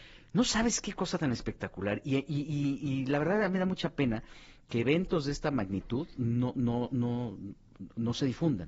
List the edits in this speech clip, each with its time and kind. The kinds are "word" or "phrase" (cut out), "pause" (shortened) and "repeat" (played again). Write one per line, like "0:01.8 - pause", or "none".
none